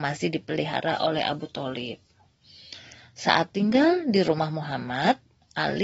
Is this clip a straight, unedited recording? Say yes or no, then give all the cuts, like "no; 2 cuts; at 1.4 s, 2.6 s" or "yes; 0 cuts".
yes; 0 cuts